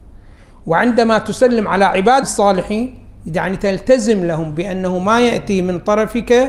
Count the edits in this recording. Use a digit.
1